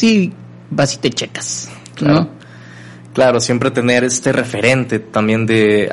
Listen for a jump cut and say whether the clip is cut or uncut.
uncut